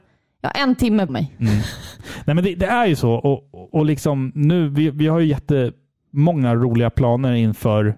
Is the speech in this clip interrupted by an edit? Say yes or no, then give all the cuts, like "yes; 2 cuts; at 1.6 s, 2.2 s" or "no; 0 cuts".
yes; 1 cut; at 1.1 s